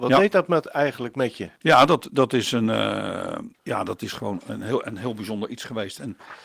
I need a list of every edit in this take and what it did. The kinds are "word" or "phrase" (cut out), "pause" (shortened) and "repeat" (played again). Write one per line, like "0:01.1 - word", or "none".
0:01.6 - pause
0:03.5 - pause